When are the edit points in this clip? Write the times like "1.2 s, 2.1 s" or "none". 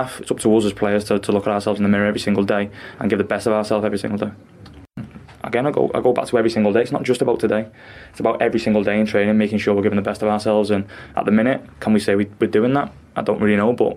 none